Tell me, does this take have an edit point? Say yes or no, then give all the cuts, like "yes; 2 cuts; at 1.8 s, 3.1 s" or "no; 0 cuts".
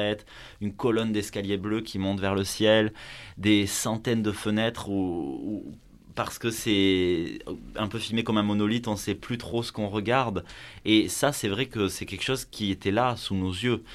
no; 0 cuts